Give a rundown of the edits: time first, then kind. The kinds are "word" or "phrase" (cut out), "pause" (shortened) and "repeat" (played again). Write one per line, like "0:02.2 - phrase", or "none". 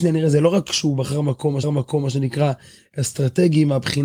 0:01.6 - repeat